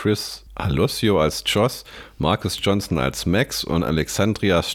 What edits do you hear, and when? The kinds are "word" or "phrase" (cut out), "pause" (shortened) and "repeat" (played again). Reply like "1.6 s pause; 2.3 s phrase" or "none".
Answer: none